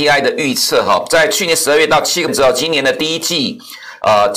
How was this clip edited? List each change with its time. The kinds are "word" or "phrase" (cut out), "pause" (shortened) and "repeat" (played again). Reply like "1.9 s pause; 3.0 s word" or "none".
2.3 s word